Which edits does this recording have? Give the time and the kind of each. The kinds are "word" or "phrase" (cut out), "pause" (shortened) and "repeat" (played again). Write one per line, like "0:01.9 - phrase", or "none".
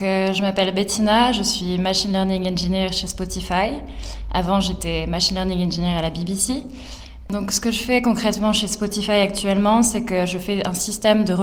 none